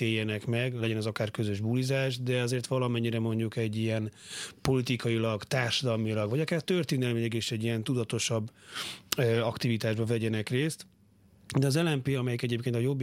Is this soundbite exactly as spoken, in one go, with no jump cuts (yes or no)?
yes